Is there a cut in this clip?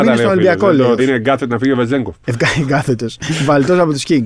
yes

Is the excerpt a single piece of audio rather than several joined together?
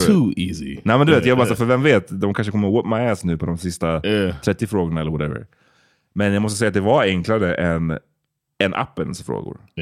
yes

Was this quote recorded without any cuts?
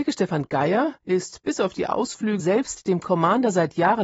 no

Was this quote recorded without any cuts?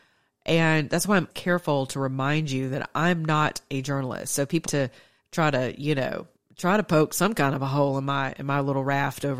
no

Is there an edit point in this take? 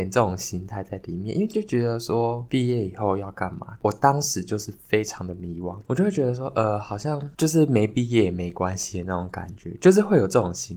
no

